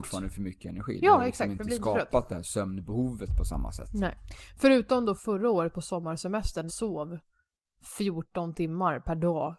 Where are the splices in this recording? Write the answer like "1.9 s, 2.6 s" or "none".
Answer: 5.2 s, 6.7 s